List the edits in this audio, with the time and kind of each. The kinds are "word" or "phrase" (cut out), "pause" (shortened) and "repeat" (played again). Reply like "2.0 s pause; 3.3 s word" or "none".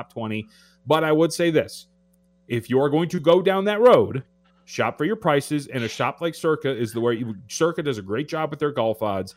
none